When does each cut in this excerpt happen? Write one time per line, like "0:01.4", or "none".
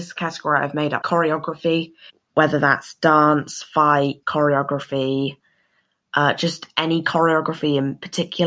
0:01.0
0:02.1
0:04.2